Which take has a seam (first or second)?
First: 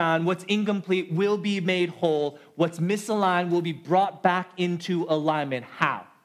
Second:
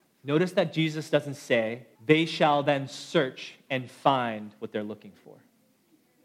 second